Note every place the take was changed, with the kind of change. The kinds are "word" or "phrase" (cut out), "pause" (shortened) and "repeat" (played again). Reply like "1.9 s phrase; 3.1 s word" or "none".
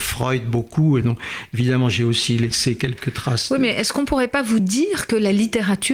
none